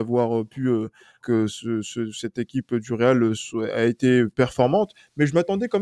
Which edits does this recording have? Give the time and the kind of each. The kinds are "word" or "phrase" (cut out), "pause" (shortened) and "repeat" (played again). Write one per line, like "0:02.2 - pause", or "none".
0:01.2 - word